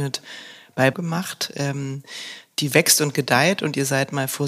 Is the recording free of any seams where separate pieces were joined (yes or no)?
no